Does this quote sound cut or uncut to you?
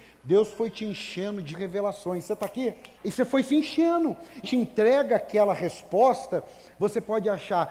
cut